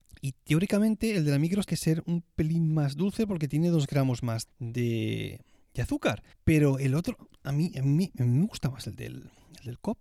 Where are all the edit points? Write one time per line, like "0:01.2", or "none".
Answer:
0:01.7
0:04.5
0:06.3
0:07.3